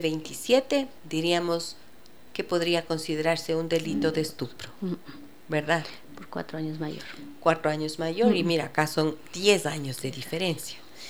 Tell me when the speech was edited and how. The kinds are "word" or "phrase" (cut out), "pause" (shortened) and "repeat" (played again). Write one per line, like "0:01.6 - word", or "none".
0:01.0 - pause